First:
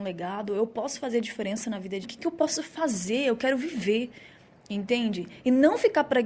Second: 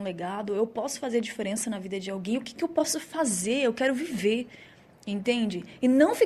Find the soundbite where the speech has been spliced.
first; 1 cut; at 2.0 s

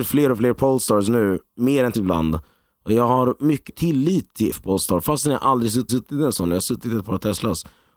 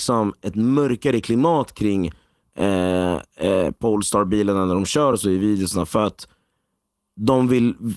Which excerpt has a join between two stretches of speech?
first; 4 cuts; at 1.9 s, 3.7 s, 4.5 s, 5.9 s

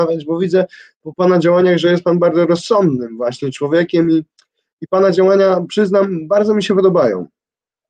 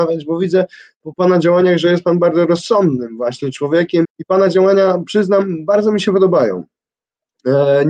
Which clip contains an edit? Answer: second; 1 cut; at 4.0 s

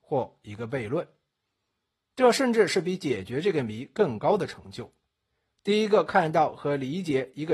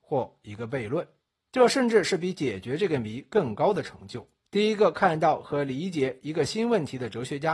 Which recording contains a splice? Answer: second; 2 cuts; at 1.2 s, 4.4 s

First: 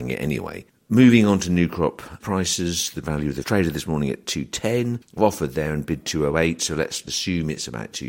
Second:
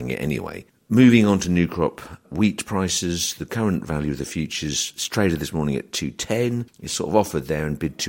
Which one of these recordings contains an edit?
first; 4 cuts; at 2.2 s, 3.0 s, 3.4 s, 5.2 s

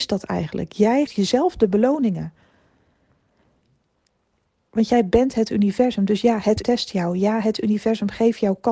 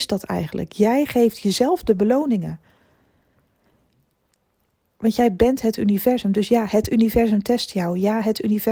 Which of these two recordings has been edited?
first; 2 cuts; at 1.1 s, 6.6 s

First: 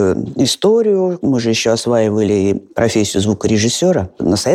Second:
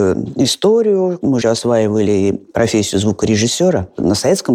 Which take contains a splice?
second; 1 cut; at 1.4 s

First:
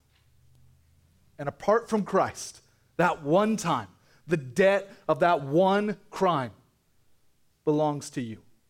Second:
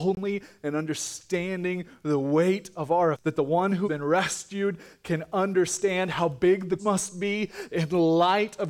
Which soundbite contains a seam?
second; 3 cuts; at 3.1 s, 3.8 s, 6.8 s

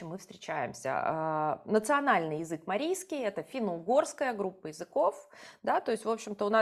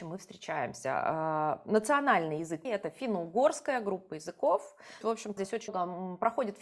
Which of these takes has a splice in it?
second; 4 cuts; at 2.6 s, 5.0 s, 5.4 s, 5.7 s

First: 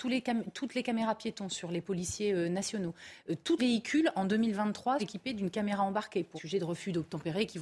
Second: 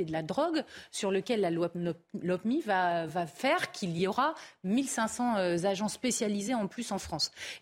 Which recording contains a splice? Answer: first; 3 cuts; at 3.6 s, 5.0 s, 6.4 s

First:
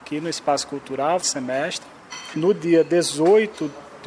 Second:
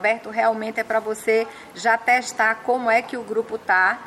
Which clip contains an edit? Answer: first; 1 cut; at 1.2 s

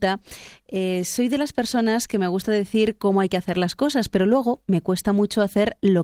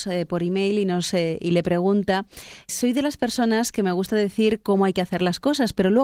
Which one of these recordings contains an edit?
second; 1 cut; at 2.7 s

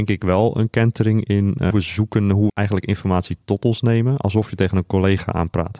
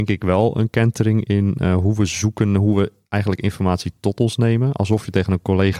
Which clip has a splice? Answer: first; 2 cuts; at 1.7 s, 2.5 s

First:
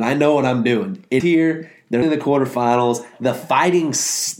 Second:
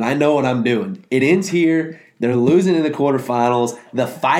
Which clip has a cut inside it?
first; 2 cuts; at 1.2 s, 2.0 s

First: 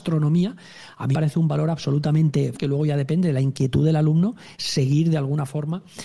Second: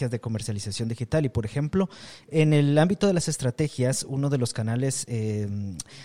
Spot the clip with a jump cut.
first; 2 cuts; at 1.1 s, 2.5 s

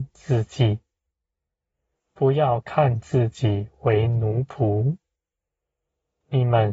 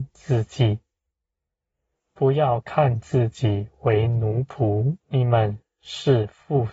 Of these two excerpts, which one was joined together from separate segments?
second; 1 cut; at 5.0 s

